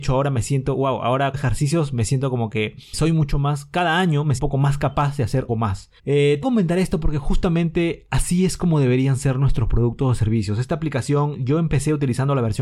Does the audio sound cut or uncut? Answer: cut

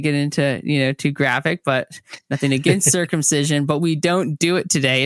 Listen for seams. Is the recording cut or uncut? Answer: uncut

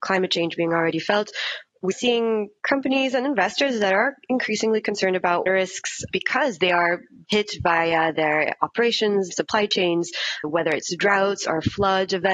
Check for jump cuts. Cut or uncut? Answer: cut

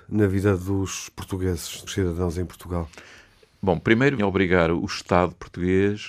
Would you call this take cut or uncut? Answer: cut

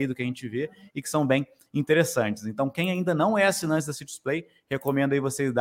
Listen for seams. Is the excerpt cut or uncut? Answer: uncut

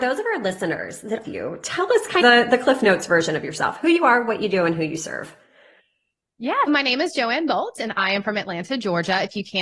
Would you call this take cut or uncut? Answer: cut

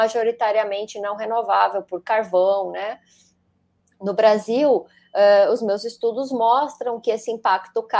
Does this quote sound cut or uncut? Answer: uncut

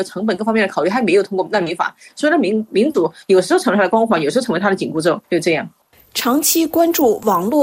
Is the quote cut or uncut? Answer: cut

